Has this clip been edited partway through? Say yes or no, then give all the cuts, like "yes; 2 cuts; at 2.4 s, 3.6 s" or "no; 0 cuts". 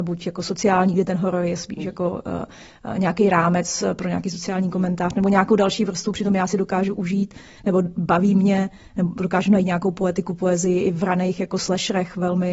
no; 0 cuts